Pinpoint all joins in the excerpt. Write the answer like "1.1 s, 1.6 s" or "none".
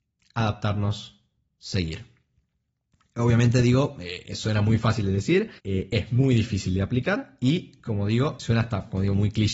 5.6 s, 8.4 s